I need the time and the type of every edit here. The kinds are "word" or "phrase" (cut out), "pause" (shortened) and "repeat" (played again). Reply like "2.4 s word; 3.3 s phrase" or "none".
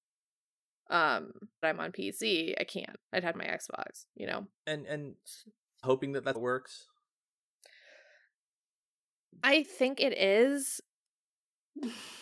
1.6 s word; 3.0 s pause; 3.3 s phrase; 4.1 s pause; 4.5 s pause; 5.8 s word; 6.3 s word